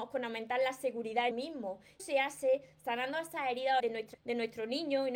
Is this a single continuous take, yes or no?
no